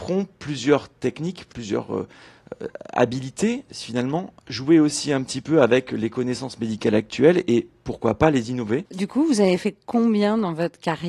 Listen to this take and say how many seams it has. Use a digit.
0